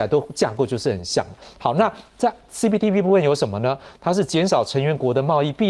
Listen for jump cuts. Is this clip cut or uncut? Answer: uncut